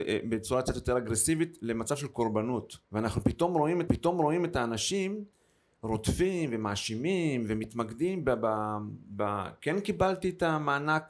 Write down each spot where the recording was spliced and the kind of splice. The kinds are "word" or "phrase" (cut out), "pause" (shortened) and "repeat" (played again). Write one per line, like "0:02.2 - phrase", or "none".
0:02.8 - pause
0:03.9 - repeat